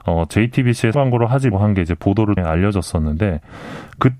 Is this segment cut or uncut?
cut